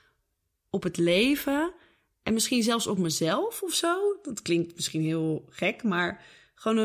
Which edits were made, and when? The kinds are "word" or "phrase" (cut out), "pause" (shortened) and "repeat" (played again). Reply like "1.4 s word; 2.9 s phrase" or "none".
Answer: none